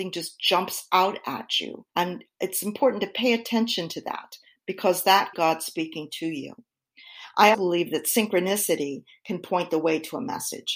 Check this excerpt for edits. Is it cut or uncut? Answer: cut